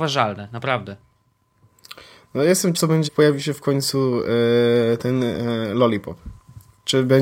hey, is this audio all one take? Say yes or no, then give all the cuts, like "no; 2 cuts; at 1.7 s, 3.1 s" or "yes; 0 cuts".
no; 2 cuts; at 2.7 s, 3.1 s